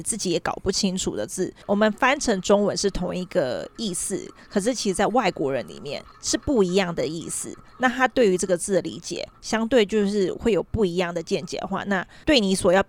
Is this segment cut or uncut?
cut